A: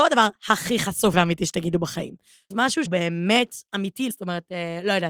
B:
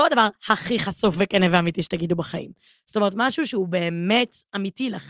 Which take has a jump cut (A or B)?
A